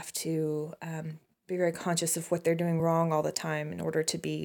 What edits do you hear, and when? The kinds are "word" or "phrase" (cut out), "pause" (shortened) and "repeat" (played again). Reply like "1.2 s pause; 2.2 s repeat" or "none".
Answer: none